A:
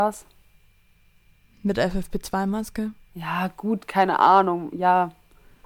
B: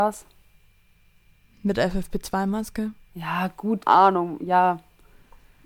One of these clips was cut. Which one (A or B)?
B